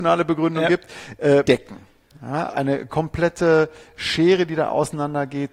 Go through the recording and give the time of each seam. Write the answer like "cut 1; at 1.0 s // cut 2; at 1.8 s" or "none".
cut 1; at 1.4 s // cut 2; at 2.5 s